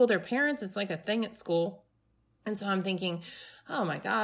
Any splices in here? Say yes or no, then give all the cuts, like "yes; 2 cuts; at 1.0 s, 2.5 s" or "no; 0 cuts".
no; 0 cuts